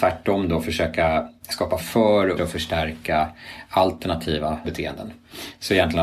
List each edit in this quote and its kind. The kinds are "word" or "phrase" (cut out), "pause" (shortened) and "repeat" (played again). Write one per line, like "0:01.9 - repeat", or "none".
0:01.8 - word
0:02.4 - word
0:04.6 - word